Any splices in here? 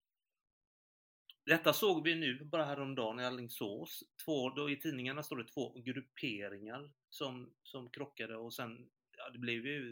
no; 0 cuts

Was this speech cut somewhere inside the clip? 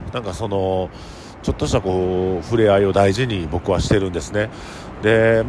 no; 0 cuts

